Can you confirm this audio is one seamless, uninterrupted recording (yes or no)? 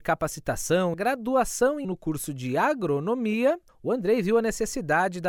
no